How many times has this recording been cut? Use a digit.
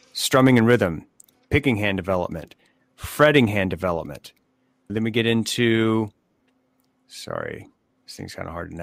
1